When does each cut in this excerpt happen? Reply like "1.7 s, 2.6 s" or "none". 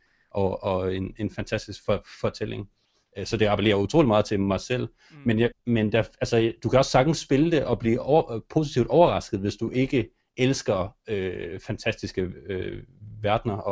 5.5 s